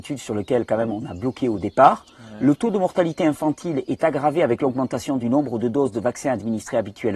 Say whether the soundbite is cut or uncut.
uncut